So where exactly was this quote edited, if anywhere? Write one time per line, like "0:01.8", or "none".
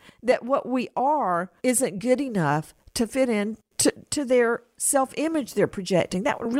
0:01.6
0:03.7